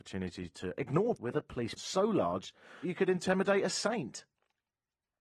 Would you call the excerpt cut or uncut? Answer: cut